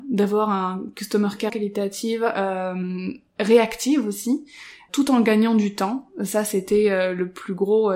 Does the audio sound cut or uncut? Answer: cut